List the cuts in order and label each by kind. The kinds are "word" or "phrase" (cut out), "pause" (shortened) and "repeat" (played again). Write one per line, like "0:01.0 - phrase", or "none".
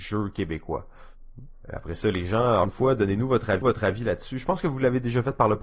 0:02.6 - word
0:03.6 - repeat